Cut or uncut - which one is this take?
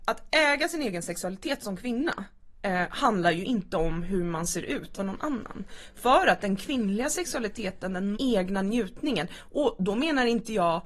cut